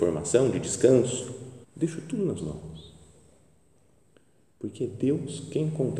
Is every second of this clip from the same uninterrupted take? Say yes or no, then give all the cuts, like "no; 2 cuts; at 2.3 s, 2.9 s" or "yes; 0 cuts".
no; 2 cuts; at 1.6 s, 2.4 s